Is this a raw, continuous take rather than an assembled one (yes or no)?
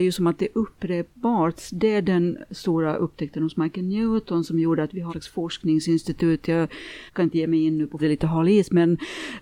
no